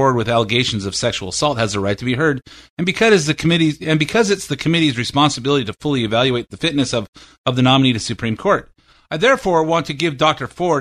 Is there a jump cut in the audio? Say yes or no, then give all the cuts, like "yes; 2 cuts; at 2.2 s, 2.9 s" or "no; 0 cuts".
no; 0 cuts